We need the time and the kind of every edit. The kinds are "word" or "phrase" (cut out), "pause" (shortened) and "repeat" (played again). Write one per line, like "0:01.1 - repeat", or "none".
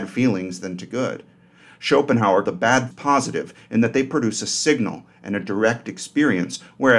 0:02.4 - word
0:02.9 - word